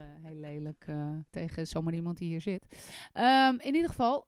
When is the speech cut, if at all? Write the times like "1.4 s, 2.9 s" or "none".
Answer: 1.3 s

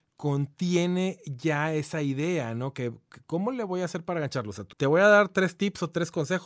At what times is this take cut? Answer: 4.7 s

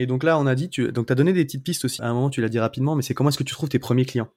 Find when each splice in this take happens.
2.0 s

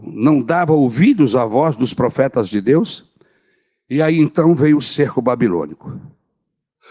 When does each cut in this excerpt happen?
none

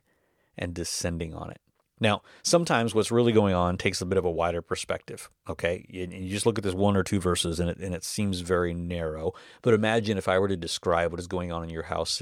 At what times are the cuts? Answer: 1.8 s

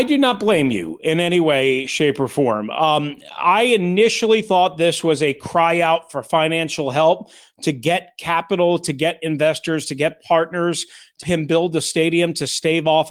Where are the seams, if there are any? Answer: 11.2 s

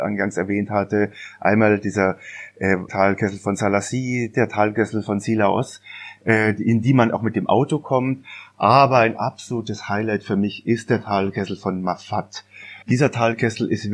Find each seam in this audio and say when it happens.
2.9 s, 12.8 s

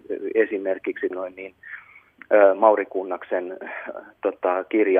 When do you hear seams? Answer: 1.1 s

